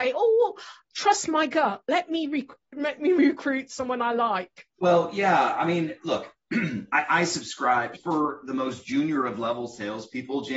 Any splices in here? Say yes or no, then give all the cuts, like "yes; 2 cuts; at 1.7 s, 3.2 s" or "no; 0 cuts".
yes; 1 cut; at 7.9 s